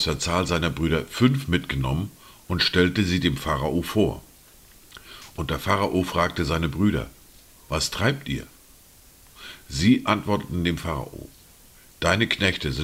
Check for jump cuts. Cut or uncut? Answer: uncut